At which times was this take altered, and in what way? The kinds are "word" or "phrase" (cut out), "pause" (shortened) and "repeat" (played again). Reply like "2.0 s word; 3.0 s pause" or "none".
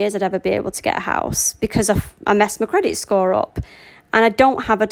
none

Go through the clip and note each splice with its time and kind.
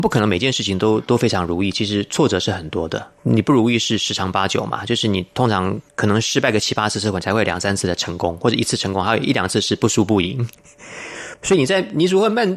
3.2 s pause

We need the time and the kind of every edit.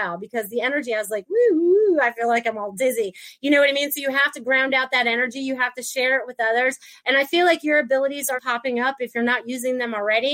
8.3 s word

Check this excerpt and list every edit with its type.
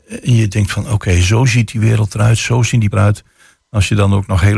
2.9 s word

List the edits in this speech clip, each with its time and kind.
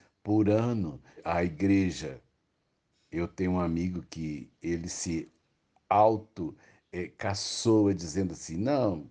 1.2 s word

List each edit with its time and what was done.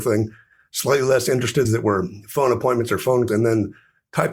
1.6 s word; 3.3 s word

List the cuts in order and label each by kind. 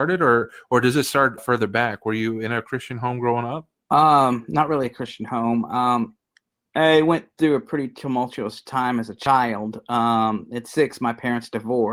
1.4 s word; 3.8 s pause; 6.5 s pause

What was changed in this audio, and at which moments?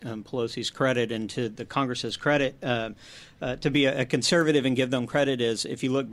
none

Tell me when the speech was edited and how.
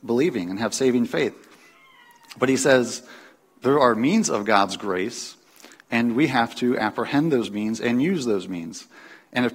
none

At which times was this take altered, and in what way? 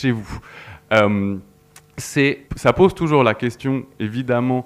2.4 s pause

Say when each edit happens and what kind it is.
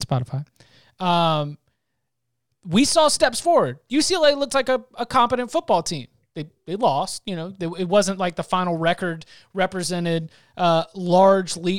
none

